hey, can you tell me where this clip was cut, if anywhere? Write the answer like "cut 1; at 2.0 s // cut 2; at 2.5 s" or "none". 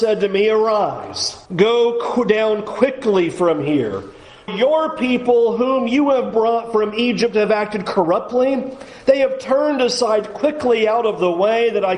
cut 1; at 1.5 s // cut 2; at 4.5 s